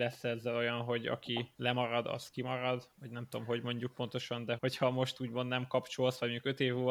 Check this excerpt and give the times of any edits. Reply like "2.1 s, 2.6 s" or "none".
1.5 s, 2.9 s, 4.6 s